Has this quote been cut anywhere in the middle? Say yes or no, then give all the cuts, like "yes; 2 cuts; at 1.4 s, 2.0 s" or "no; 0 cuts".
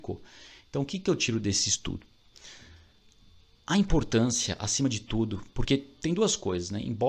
no; 0 cuts